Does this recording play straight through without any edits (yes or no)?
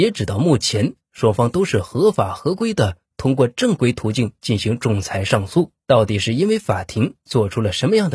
no